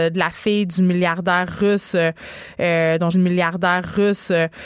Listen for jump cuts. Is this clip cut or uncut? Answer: cut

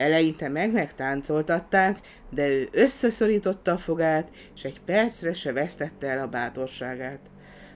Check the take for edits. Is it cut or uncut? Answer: uncut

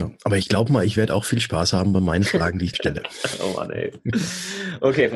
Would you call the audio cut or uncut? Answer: cut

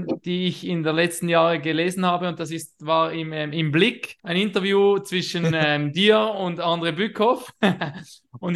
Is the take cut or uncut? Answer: cut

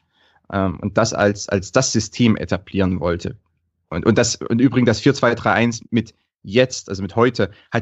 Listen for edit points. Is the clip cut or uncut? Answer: uncut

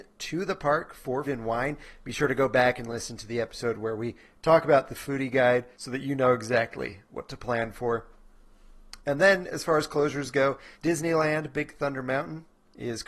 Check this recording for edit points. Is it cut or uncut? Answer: cut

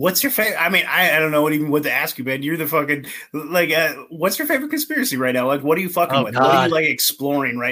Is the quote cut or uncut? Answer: uncut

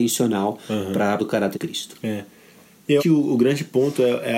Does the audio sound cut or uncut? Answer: cut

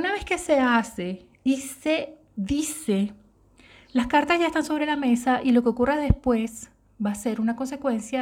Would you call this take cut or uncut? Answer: uncut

